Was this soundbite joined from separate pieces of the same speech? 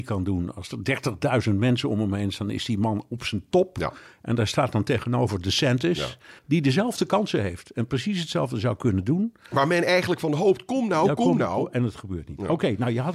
yes; 1 cut; at 6.4 s

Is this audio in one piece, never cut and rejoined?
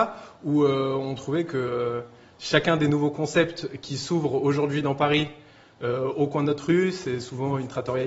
yes; 0 cuts

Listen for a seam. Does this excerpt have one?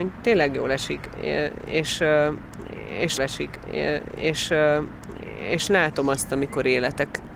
yes; 1 cut; at 3.2 s

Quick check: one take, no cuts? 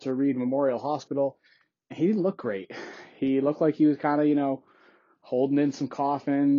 yes; 0 cuts

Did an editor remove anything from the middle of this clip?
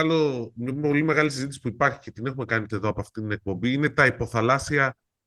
yes; 1 cut; at 2.7 s

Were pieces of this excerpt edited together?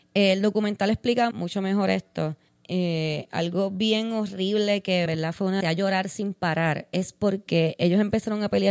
yes; 4 cuts; at 1.3 s, 2.5 s, 5.1 s, 5.6 s

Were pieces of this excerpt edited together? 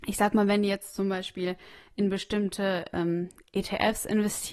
no; 0 cuts

